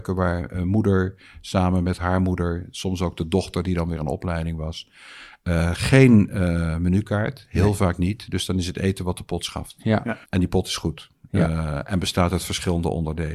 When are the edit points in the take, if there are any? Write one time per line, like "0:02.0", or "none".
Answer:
0:10.2

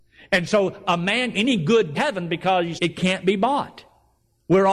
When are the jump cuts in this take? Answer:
0:01.3
0:01.9
0:02.8

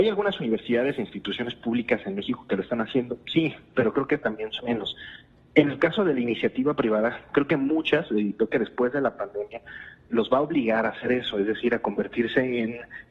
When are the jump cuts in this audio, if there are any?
0:04.6
0:10.1

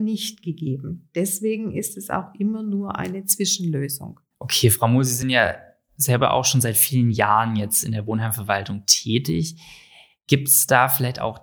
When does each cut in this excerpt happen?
none

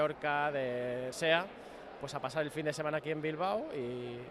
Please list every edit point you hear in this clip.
0:01.1

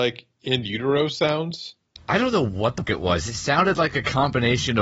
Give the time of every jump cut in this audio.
0:02.9

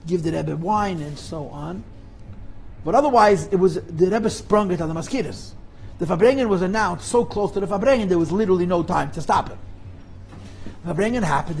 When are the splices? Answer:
none

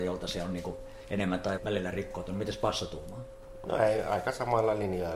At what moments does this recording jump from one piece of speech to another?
0:01.6

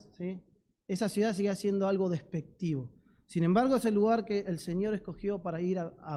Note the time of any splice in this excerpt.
none

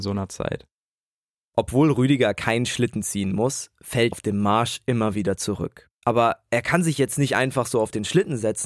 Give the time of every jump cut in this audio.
0:04.1

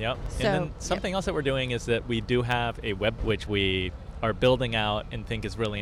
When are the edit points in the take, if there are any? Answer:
0:03.2

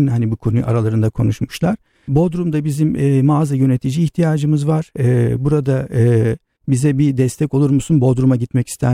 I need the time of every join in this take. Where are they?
none

